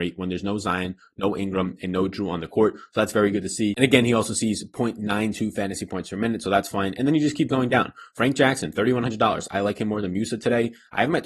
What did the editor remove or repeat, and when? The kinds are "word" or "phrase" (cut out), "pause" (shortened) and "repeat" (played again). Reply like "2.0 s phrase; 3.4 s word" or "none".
none